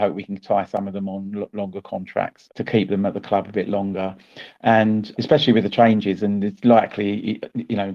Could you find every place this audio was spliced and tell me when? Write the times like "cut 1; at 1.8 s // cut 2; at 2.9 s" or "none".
cut 1; at 2.5 s // cut 2; at 5.1 s

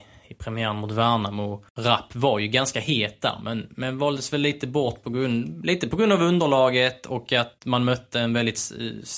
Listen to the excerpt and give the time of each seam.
cut 1; at 1.7 s

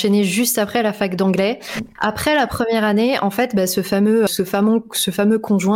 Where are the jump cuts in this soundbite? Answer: cut 1; at 4.3 s

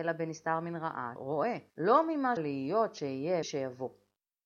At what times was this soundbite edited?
cut 1; at 1.2 s // cut 2; at 1.7 s // cut 3; at 2.4 s // cut 4; at 3.4 s

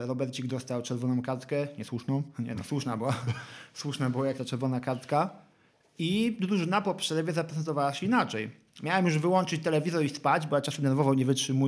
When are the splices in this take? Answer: cut 1; at 4.4 s

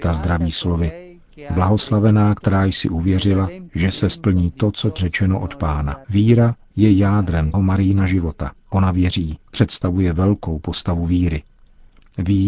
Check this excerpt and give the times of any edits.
cut 1; at 5.0 s // cut 2; at 6.0 s // cut 3; at 7.5 s // cut 4; at 8.6 s // cut 5; at 9.4 s

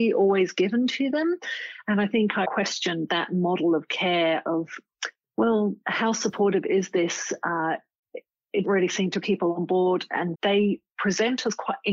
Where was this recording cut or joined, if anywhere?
cut 1; at 2.4 s // cut 2; at 5.2 s // cut 3; at 8.6 s // cut 4; at 9.2 s // cut 5; at 10.3 s

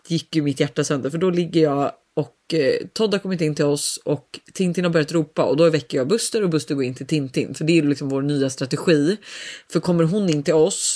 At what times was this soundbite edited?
none

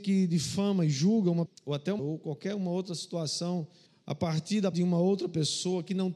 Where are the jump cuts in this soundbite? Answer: cut 1; at 1.5 s // cut 2; at 2.0 s // cut 3; at 3.9 s // cut 4; at 4.7 s

